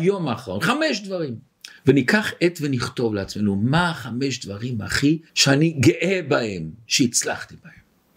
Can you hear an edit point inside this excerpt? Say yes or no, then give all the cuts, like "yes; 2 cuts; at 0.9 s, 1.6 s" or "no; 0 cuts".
yes; 2 cuts; at 1.8 s, 5.3 s